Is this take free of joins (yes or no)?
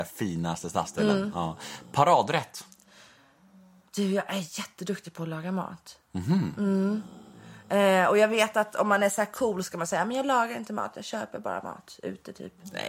yes